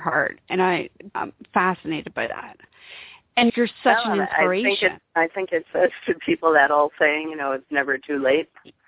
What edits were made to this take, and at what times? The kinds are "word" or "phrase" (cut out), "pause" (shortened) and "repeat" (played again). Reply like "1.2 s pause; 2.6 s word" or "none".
1.1 s word; 3.5 s word; 5.1 s pause

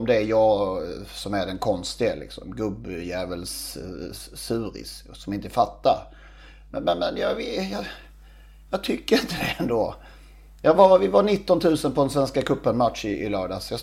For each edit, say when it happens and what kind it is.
none

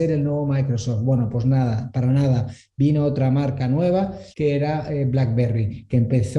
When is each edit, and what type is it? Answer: 4.3 s pause

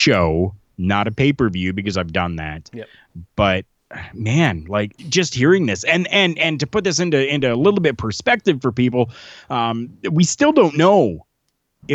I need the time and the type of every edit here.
5.0 s pause

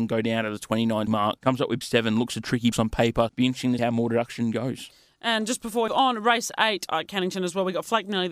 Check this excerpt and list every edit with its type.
1.1 s word; 1.4 s word; 1.8 s word; 2.7 s word; 3.3 s word; 3.8 s word; 5.9 s word; 6.9 s word

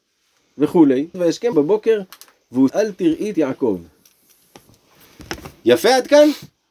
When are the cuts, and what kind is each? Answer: 1.1 s word; 1.5 s word; 2.7 s word; 3.3 s word

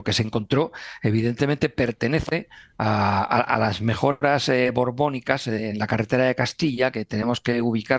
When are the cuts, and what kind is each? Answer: none

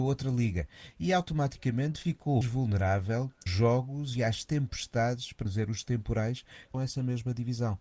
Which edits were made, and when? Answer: 2.4 s word; 3.5 s word; 5.5 s word; 6.7 s phrase

